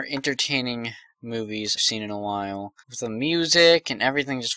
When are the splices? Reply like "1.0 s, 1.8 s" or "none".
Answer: 1.8 s, 2.8 s